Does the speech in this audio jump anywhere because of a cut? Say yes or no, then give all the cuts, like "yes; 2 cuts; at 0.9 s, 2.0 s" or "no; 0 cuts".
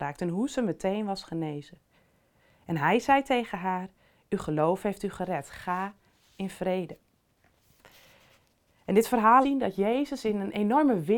yes; 1 cut; at 9.4 s